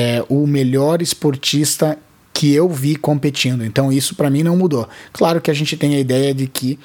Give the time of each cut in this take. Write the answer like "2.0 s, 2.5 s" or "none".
none